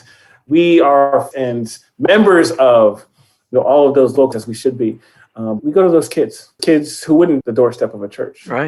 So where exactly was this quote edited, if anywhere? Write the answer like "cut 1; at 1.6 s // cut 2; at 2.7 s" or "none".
cut 1; at 1.3 s // cut 2; at 4.3 s // cut 3; at 5.6 s // cut 4; at 6.6 s // cut 5; at 7.4 s